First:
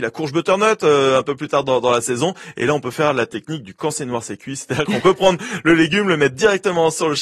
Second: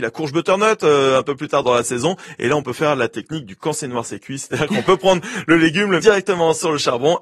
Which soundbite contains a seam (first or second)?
second